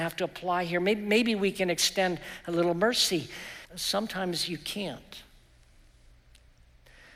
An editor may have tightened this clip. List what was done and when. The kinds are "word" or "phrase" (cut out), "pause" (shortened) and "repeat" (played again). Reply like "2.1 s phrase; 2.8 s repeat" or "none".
3.6 s pause